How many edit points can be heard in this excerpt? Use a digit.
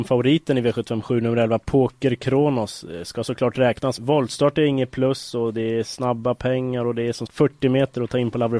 2